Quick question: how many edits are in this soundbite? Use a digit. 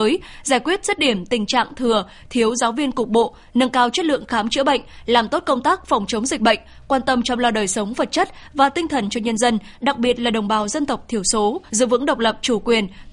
1